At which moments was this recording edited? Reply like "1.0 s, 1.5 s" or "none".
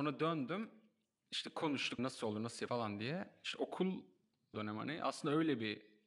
2.0 s, 2.7 s, 4.5 s